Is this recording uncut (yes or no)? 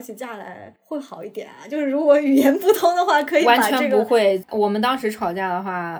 yes